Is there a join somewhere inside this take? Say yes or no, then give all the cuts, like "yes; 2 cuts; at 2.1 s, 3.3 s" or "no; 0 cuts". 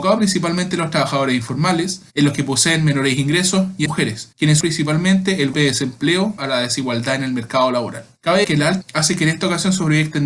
yes; 6 cuts; at 3.9 s, 4.6 s, 5.5 s, 6.4 s, 8.4 s, 8.8 s